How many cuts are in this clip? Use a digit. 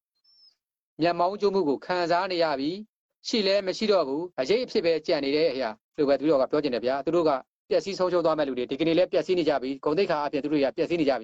2